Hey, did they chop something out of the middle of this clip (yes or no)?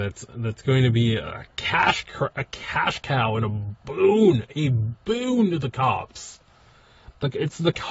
no